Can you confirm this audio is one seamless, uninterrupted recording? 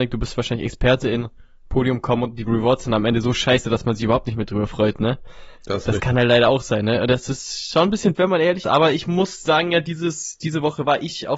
no; 4 cuts; at 5.6 s, 6.0 s, 8.1 s, 8.6 s

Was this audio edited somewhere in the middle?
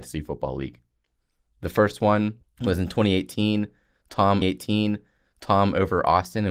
yes; 2 cuts; at 2.4 s, 4.4 s

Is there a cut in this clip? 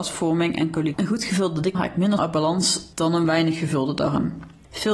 yes; 3 cuts; at 0.9 s, 1.7 s, 2.2 s

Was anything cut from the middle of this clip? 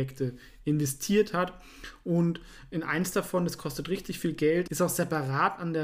no; 0 cuts

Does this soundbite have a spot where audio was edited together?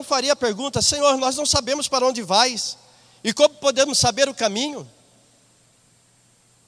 no; 0 cuts

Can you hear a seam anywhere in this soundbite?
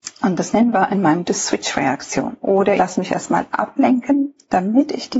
yes; 2 cuts; at 1.2 s, 2.8 s

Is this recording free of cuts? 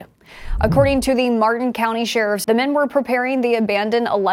no; 1 cut; at 2.4 s

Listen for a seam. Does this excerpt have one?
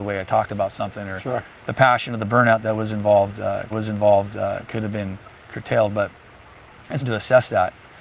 yes; 2 cuts; at 3.7 s, 7.0 s

